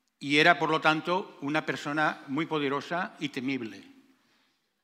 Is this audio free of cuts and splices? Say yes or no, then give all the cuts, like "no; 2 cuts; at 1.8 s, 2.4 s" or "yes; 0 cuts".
yes; 0 cuts